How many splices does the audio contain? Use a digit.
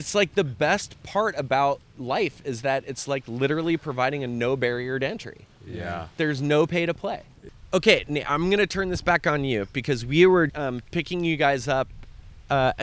1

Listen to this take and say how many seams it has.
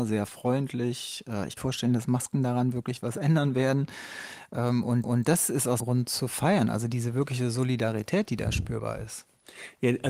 3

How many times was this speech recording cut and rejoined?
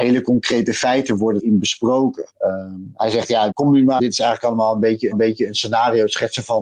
5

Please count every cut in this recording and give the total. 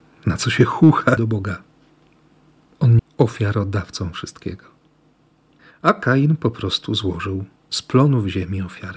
2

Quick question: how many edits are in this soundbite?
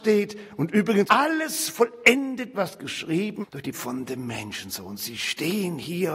4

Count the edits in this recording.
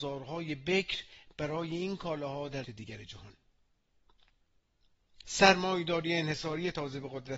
2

